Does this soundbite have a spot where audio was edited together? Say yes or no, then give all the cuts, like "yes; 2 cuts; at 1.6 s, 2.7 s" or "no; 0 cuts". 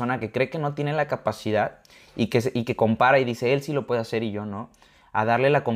no; 0 cuts